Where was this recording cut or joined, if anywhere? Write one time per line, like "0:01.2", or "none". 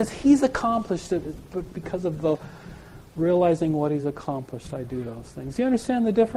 none